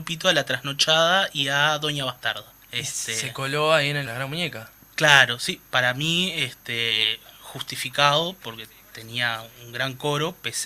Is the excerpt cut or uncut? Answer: cut